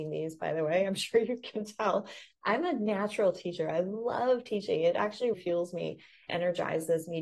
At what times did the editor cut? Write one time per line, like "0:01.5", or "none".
0:05.3
0:06.3